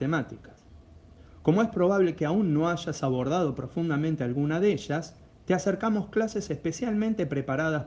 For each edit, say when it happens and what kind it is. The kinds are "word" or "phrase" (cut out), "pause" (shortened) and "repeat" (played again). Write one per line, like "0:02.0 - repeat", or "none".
0:06.5 - word